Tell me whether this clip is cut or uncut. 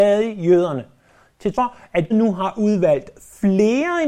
cut